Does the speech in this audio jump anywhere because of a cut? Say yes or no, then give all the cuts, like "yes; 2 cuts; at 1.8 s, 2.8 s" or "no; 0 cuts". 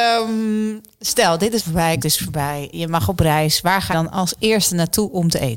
yes; 4 cuts; at 1.6 s, 2.0 s, 2.7 s, 3.9 s